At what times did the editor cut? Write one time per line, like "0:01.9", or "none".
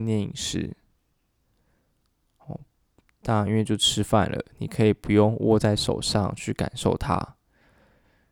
none